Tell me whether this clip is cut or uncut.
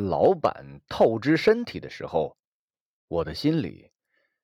uncut